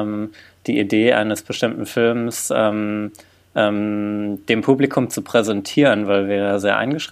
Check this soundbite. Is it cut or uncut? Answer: uncut